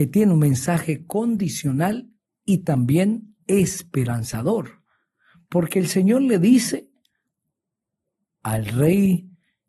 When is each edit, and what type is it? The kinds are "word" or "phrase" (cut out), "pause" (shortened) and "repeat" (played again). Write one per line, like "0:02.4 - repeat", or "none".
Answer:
none

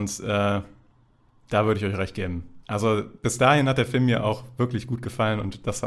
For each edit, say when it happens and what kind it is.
0:02.6 - pause

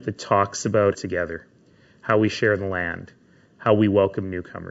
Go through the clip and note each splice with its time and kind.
0:00.9 - phrase

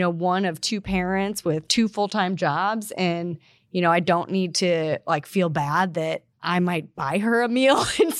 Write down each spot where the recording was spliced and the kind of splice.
none

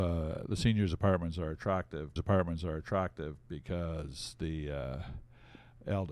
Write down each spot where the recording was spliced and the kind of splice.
0:02.2 - repeat

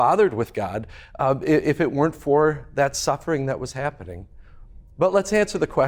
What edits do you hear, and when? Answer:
none

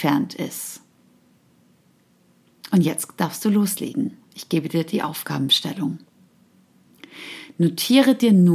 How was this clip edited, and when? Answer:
none

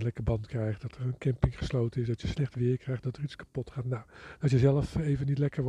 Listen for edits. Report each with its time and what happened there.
none

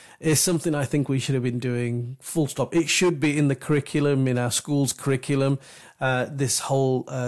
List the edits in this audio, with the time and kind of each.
none

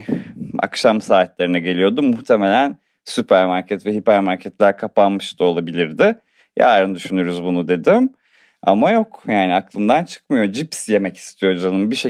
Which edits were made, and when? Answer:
none

